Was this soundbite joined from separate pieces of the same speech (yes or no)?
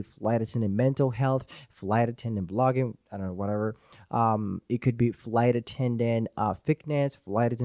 no